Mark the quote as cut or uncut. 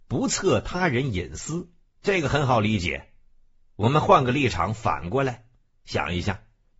cut